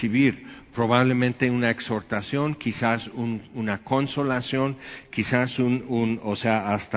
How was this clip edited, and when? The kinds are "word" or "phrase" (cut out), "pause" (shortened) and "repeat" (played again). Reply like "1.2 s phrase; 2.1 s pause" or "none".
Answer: none